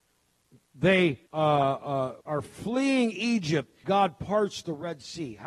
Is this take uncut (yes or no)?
no